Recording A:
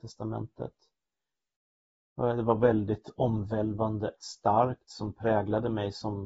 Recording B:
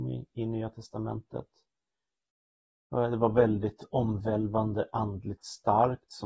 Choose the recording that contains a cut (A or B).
A